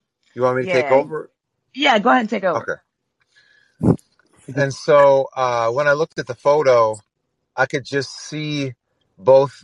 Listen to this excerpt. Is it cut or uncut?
uncut